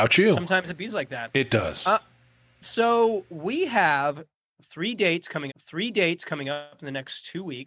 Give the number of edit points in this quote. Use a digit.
1